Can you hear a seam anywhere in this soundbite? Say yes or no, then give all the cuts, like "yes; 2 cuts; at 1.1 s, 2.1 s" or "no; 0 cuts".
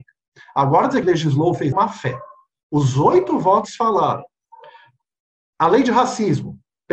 yes; 2 cuts; at 1.0 s, 1.7 s